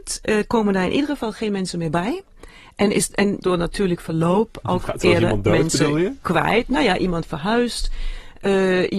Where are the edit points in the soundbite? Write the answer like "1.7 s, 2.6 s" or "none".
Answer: 3.4 s